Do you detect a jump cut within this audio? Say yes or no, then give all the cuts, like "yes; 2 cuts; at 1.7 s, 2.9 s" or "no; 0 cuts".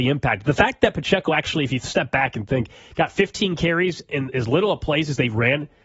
no; 0 cuts